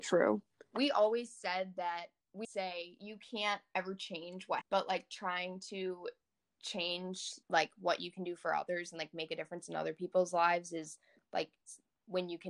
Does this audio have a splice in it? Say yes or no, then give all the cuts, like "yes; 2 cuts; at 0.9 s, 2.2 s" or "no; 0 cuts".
yes; 3 cuts; at 2.4 s, 4.6 s, 7.4 s